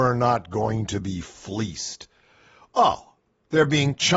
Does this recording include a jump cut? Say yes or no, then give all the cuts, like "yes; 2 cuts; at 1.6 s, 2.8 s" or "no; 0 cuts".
no; 0 cuts